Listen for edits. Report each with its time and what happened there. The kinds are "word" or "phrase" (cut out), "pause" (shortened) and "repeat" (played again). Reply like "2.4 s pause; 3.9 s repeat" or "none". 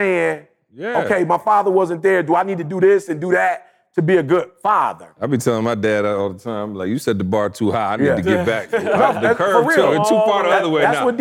none